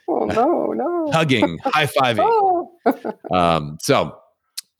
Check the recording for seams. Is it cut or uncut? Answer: uncut